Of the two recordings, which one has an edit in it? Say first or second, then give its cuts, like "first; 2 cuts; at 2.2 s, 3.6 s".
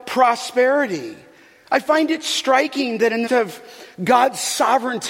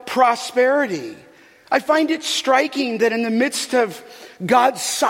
first; 1 cut; at 3.3 s